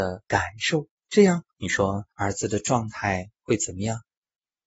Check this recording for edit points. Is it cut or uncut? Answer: cut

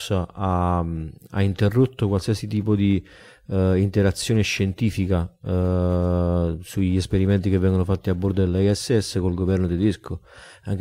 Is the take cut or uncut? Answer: uncut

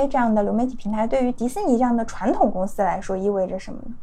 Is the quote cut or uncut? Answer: uncut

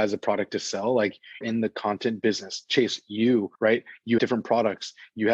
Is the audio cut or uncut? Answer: cut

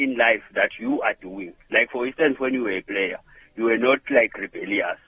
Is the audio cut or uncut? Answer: uncut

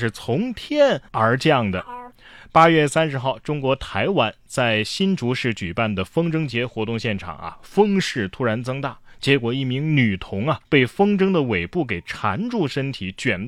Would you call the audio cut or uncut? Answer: cut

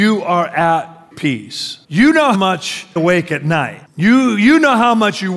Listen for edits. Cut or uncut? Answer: cut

